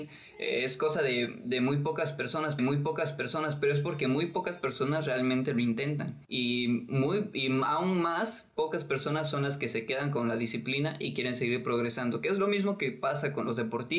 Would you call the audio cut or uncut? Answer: cut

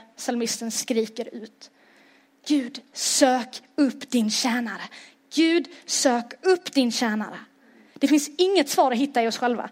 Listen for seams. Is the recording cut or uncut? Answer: uncut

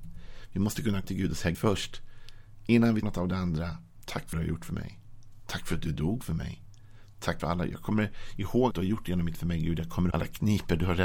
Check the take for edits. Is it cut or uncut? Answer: cut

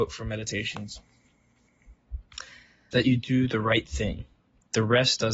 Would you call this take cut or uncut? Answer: cut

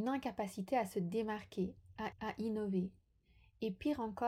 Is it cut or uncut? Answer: cut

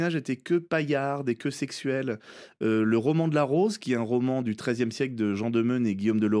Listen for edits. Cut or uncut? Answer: uncut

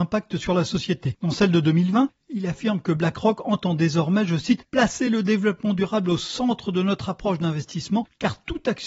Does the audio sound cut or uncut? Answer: uncut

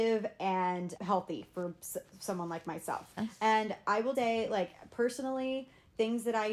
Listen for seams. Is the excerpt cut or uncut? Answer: cut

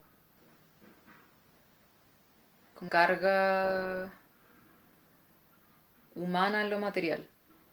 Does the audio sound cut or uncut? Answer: cut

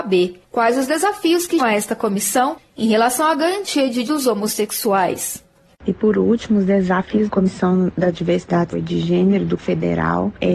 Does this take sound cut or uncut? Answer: cut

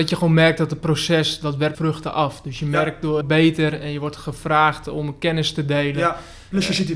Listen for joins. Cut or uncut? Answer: cut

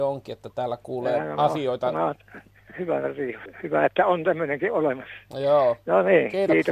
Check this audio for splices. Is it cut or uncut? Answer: uncut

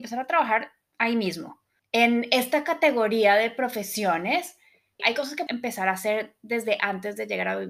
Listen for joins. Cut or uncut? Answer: cut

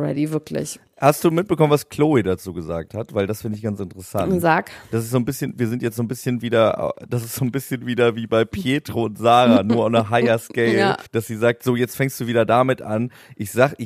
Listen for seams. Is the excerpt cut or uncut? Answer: cut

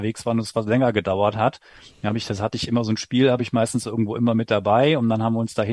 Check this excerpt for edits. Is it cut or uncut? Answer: uncut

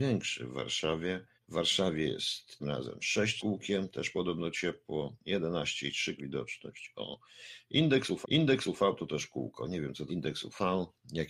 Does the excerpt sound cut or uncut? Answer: cut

